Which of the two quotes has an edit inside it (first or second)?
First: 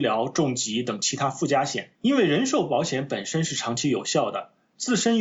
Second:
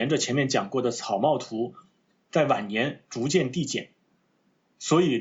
first